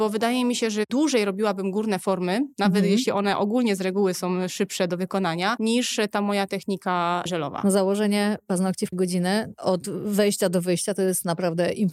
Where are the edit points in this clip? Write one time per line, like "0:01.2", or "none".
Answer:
0:08.9